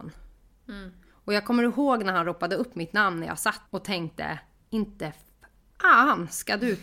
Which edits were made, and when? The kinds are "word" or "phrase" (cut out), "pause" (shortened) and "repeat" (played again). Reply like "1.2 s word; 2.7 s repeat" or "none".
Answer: 3.7 s word